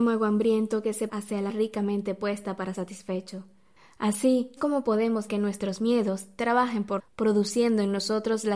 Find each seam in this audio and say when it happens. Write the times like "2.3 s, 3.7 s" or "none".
1.1 s, 1.5 s, 2.7 s, 4.6 s, 5.3 s, 7.0 s